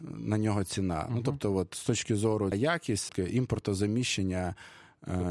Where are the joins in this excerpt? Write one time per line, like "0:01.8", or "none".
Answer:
0:02.5
0:03.1